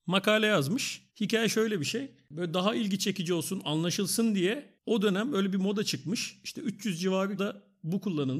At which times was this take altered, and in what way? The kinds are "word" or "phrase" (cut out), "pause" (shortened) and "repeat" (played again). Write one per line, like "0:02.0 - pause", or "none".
0:01.1 - pause
0:04.8 - pause
0:07.4 - word

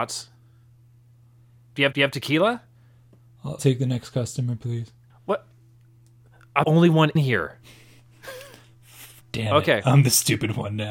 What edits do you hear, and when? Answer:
0:01.9 - repeat
0:03.6 - word
0:05.1 - pause
0:06.6 - word
0:07.2 - word
0:09.2 - pause

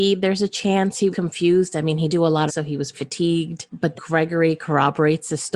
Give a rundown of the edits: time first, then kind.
0:01.1 - word
0:02.1 - word
0:02.5 - phrase
0:02.9 - word
0:03.9 - word

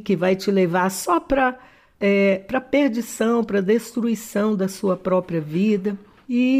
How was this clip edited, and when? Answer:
none

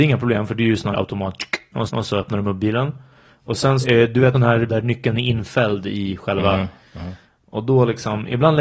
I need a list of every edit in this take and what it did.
0:00.9 - word
0:01.9 - repeat
0:03.8 - word
0:04.3 - phrase
0:04.7 - word

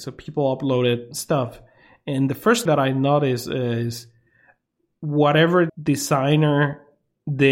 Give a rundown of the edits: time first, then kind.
0:02.7 - word
0:05.7 - word

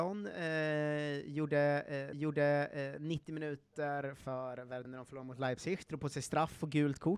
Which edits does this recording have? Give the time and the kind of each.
0:02.1 - repeat
0:04.8 - word

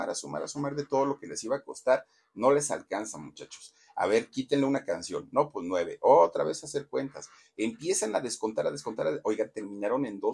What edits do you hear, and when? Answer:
none

